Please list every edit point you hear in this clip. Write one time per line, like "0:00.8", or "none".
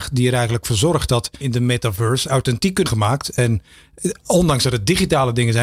0:01.4
0:02.9